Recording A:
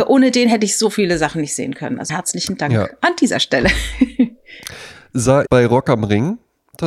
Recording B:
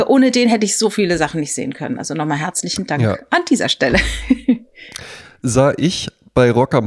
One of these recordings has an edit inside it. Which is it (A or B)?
A